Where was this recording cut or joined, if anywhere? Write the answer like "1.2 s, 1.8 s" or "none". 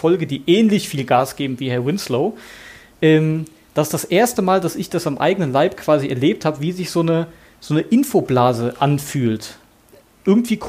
none